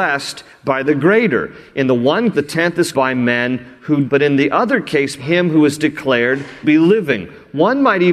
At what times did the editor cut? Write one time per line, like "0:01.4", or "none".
0:02.3
0:02.9
0:04.1
0:05.2
0:06.6

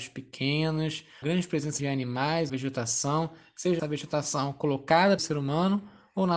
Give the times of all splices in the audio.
0:01.2
0:01.8
0:02.5
0:03.8
0:05.2

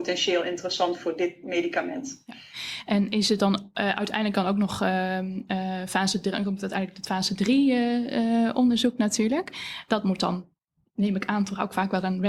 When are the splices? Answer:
none

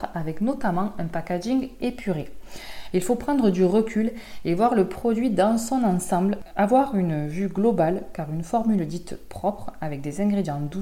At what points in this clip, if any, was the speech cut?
none

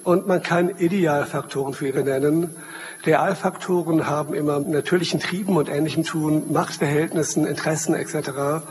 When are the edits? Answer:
0:01.9
0:04.6
0:06.0

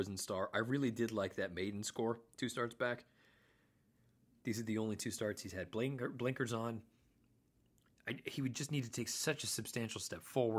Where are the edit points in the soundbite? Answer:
none

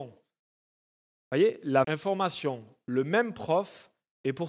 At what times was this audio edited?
0:01.8

